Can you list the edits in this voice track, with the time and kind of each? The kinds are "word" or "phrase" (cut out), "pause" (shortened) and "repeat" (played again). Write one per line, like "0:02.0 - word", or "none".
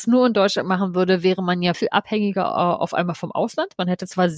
0:01.7 - word